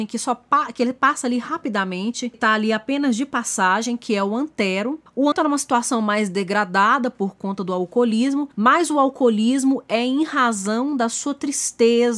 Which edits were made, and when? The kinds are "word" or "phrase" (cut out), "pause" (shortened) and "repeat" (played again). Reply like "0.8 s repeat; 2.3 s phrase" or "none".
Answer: 2.3 s word; 5.3 s word; 8.5 s pause